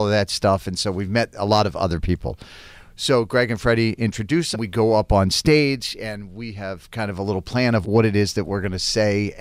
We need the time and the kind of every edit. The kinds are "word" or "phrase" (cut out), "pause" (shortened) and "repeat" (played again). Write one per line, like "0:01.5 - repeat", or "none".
0:04.5 - phrase
0:07.8 - word

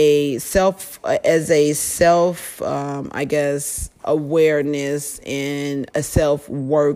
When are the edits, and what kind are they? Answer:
0:05.9 - word

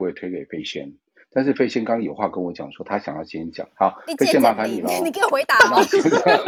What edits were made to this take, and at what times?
none

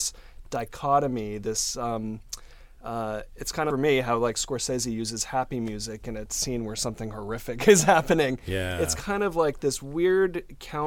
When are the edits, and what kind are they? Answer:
0:03.7 - phrase

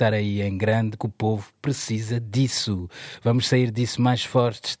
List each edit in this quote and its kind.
0:01.0 - word

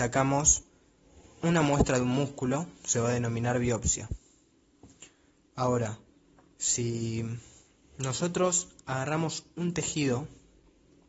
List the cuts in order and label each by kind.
none

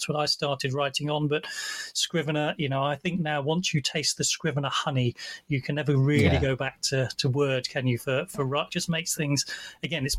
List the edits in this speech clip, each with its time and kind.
0:08.7 - phrase

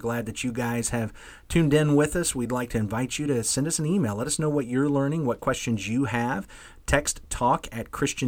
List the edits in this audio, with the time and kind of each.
none

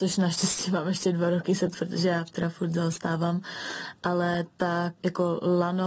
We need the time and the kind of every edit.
0:01.7 - word
0:02.3 - phrase
0:05.0 - word

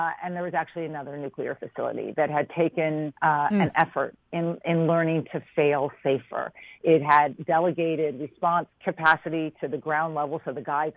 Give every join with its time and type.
0:03.2 - pause
0:08.7 - pause

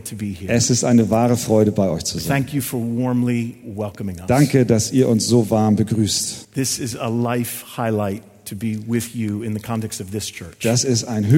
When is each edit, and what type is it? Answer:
0:06.4 - pause

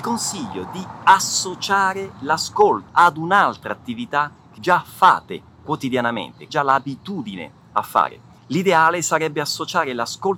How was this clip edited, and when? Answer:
0:02.9 - word
0:04.6 - word
0:06.5 - word
0:08.4 - pause

